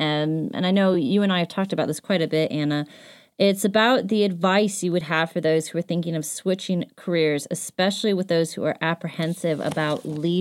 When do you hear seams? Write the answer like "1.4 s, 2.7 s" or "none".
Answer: none